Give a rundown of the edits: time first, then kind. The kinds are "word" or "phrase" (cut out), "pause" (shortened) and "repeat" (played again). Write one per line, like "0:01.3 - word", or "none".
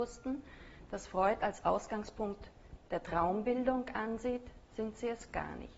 none